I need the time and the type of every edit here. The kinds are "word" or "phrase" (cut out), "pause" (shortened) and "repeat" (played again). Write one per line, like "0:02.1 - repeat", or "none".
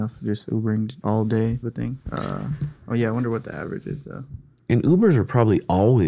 0:01.0 - word
0:01.6 - word